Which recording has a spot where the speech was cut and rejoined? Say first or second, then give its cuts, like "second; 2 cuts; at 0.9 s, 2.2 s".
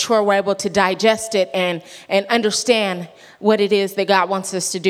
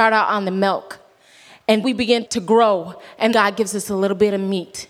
second; 3 cuts; at 1.8 s, 2.2 s, 3.3 s